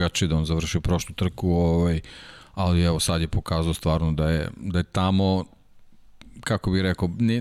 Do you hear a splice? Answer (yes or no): no